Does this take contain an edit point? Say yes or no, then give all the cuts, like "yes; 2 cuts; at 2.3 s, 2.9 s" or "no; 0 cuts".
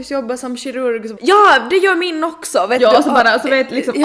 yes; 1 cut; at 1.2 s